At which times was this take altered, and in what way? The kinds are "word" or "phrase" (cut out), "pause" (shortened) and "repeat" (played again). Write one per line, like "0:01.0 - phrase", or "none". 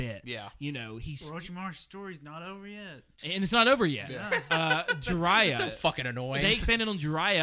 0:03.1 - pause